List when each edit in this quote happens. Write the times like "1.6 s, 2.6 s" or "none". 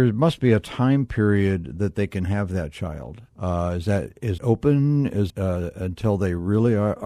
3.3 s, 4.4 s, 5.3 s